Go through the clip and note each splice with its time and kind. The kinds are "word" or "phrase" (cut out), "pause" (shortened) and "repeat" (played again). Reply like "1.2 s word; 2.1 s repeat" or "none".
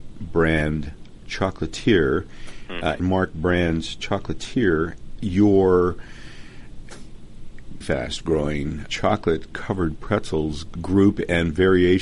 3.0 s word; 5.2 s word; 7.8 s word; 8.9 s word; 10.8 s word